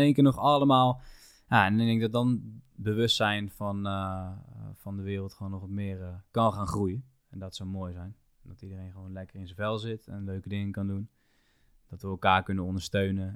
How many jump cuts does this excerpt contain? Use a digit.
0